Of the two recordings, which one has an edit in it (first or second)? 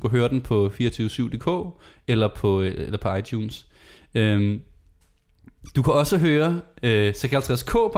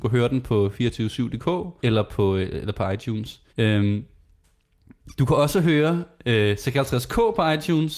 second